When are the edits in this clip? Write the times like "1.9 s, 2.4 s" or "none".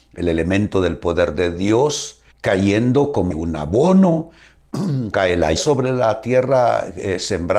2.3 s, 3.3 s, 5.1 s, 5.6 s